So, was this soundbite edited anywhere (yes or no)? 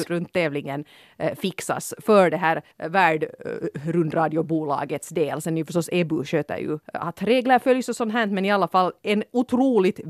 yes